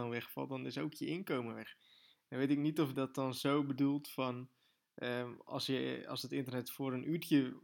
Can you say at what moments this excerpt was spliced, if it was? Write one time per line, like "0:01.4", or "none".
0:02.9